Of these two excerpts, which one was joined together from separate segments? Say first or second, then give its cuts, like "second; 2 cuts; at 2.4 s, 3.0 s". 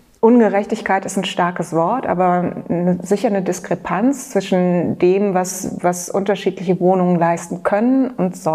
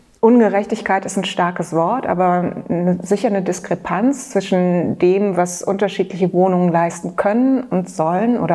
second; 1 cut; at 5.3 s